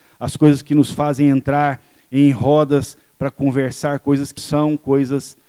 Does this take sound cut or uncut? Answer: cut